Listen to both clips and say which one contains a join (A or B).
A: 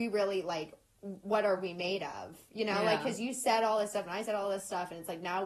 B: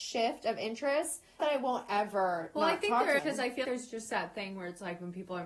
B